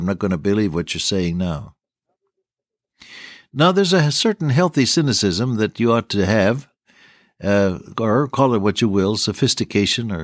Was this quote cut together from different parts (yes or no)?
yes